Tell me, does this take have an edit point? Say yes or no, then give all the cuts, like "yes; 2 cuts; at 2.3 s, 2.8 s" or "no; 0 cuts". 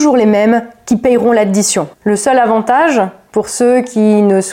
yes; 1 cut; at 1.9 s